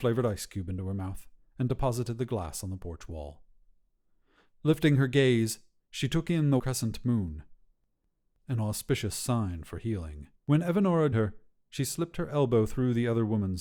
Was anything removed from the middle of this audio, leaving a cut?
yes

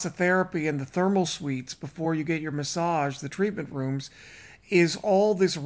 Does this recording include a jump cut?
no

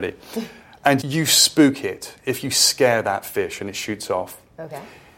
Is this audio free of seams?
no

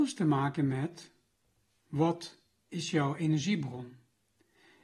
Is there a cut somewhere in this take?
no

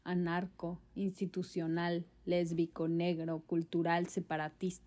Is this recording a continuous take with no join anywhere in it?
yes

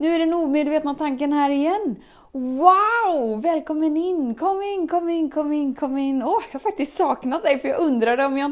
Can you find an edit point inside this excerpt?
no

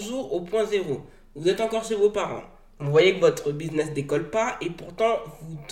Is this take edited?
no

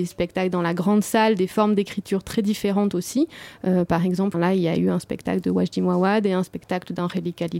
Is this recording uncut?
no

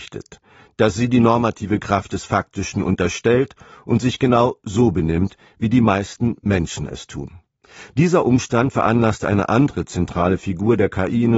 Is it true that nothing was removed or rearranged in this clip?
yes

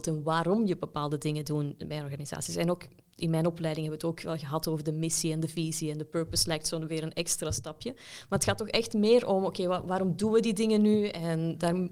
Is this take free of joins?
yes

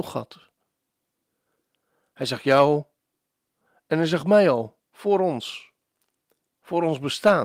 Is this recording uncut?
yes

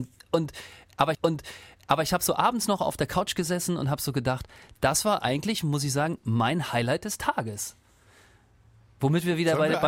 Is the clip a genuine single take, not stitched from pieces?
no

